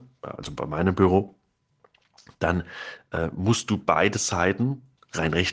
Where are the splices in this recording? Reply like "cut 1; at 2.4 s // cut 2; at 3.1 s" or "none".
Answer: none